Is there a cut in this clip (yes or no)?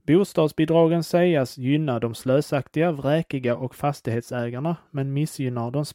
no